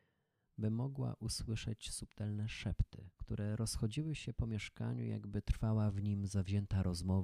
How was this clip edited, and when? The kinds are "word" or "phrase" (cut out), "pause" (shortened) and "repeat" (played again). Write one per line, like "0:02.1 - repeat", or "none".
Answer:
0:03.1 - pause